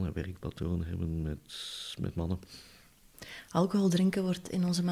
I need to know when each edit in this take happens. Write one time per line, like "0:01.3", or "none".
none